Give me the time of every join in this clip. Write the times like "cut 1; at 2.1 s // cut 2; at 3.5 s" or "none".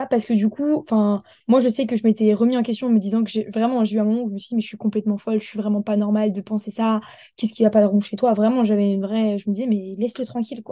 none